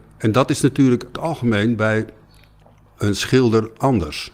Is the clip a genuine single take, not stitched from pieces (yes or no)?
no